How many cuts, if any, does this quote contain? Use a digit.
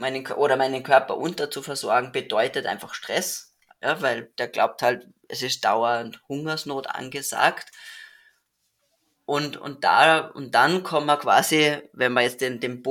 0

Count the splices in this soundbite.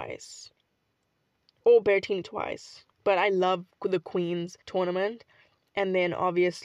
2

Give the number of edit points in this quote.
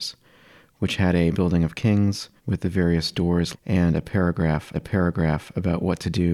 4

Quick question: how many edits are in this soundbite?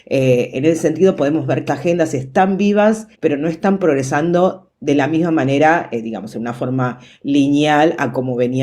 2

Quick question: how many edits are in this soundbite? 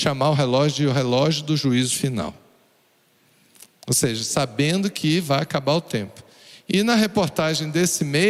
0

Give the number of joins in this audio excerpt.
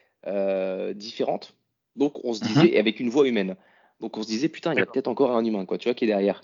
0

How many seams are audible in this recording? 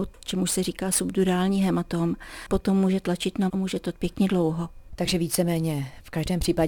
3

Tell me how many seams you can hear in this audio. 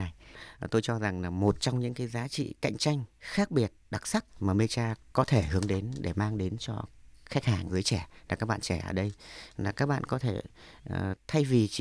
3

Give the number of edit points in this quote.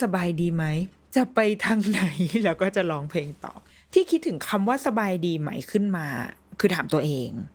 1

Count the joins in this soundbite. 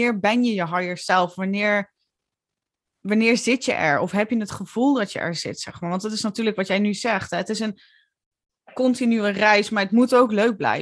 0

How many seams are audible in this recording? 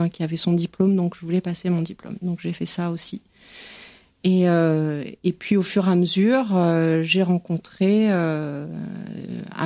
0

